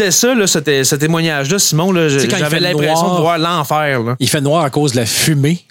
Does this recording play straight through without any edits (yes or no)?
yes